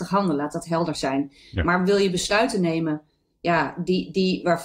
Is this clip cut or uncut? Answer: uncut